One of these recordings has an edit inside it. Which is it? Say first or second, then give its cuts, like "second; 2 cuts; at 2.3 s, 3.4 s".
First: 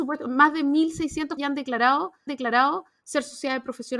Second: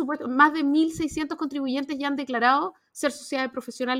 first; 2 cuts; at 1.4 s, 2.3 s